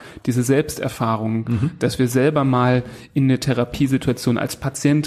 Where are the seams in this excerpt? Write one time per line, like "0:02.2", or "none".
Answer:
none